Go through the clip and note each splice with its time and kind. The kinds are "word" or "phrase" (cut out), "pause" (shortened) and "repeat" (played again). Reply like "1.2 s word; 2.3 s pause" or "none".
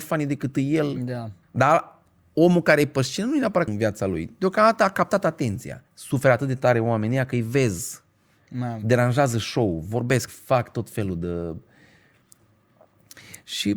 1.4 s pause; 3.7 s phrase; 5.9 s pause; 10.3 s phrase